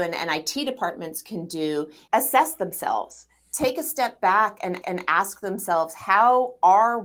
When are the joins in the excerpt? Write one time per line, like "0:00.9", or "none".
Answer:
0:02.1
0:04.8